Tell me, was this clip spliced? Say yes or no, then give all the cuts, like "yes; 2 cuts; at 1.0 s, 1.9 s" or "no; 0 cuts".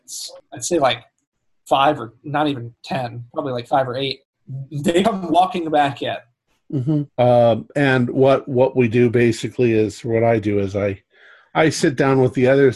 yes; 1 cut; at 7.1 s